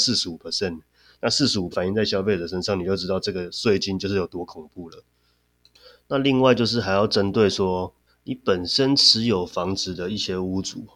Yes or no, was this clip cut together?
yes